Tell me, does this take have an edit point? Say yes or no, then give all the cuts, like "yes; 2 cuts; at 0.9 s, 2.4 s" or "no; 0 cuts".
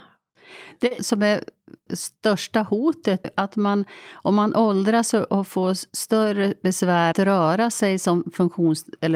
yes; 4 cuts; at 1.0 s, 1.9 s, 3.2 s, 7.1 s